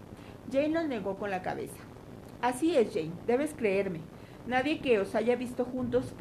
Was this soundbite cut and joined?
no; 0 cuts

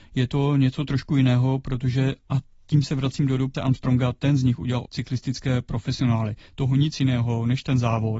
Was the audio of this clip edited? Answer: yes; 2 cuts; at 3.5 s, 4.9 s

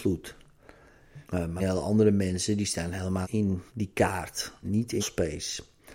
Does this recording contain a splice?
yes; 6 cuts; at 1.3 s, 1.6 s, 3.2 s, 3.7 s, 4.6 s, 5.0 s

